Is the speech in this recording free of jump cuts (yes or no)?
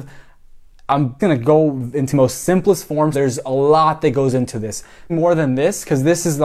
no